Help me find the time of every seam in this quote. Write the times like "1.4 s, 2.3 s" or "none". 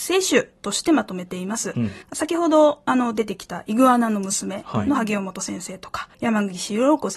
2.0 s, 6.1 s